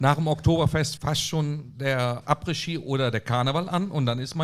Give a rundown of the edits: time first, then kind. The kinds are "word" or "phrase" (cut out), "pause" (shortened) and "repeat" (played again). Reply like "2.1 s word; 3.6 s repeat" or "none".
1.0 s word